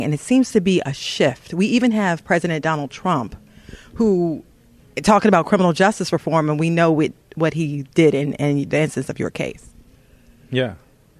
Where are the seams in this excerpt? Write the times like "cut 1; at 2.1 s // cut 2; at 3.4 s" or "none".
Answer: none